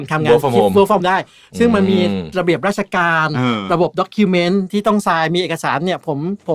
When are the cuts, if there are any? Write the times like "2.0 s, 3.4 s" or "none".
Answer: 1.0 s